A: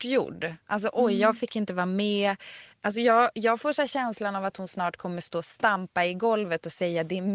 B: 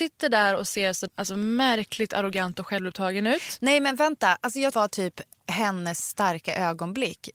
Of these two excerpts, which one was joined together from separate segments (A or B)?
B